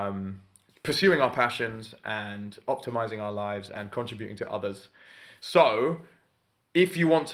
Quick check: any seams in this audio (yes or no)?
no